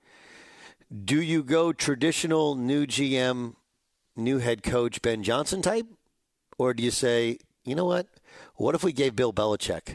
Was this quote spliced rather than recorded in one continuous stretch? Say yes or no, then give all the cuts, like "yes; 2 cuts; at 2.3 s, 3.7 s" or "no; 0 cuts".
no; 0 cuts